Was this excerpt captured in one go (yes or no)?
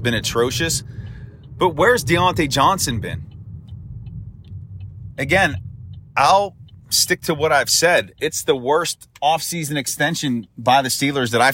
yes